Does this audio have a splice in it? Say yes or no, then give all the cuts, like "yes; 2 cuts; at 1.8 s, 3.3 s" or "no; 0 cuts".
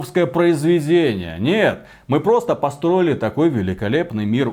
no; 0 cuts